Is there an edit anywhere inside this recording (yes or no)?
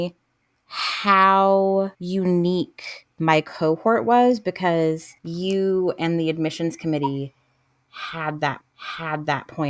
yes